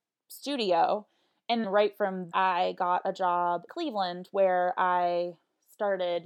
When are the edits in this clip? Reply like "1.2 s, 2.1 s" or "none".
1.6 s, 2.3 s, 3.7 s